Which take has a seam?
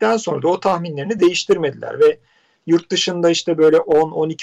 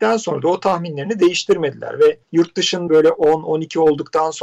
second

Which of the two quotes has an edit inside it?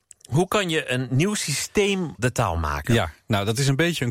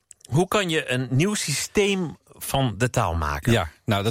first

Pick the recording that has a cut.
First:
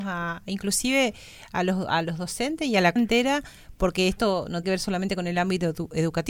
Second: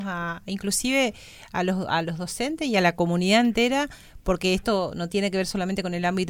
first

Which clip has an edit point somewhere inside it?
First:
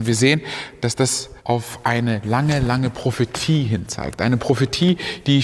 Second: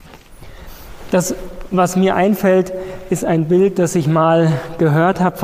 first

